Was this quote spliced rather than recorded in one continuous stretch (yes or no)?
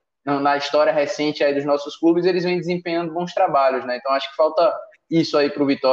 no